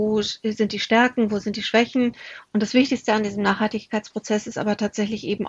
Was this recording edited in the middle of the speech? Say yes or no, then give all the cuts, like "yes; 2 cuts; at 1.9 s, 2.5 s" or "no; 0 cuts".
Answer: no; 0 cuts